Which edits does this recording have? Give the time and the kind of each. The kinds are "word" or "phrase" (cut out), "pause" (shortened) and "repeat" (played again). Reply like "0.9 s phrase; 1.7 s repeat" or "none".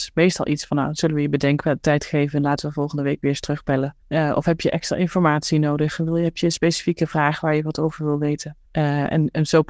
4.0 s pause; 8.7 s pause